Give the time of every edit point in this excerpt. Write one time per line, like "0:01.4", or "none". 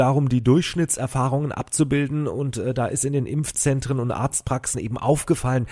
none

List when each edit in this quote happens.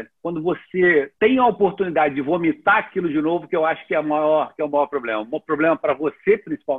0:01.1

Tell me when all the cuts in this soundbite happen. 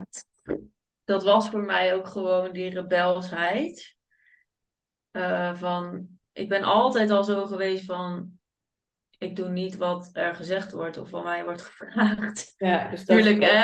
none

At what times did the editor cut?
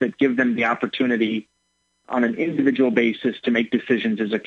none

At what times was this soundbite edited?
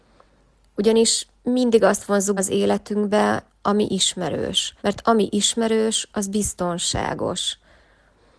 0:02.4
0:04.8

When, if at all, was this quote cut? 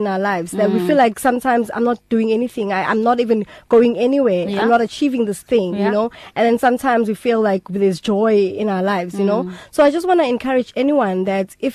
none

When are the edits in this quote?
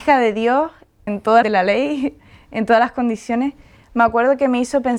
0:01.1
0:01.4

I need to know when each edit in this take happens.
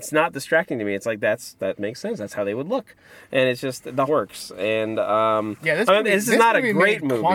0:04.1

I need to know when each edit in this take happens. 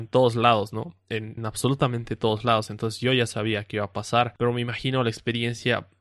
0:01.4

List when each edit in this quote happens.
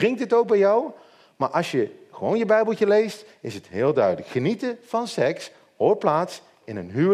none

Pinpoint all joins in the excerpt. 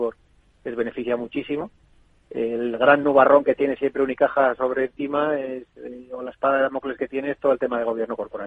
none

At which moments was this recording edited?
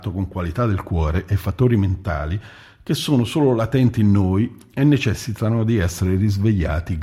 none

